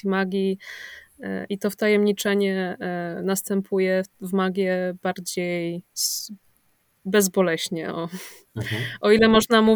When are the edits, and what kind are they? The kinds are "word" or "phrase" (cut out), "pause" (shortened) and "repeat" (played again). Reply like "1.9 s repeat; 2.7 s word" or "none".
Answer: none